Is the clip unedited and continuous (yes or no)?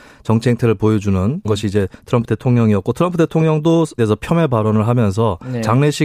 no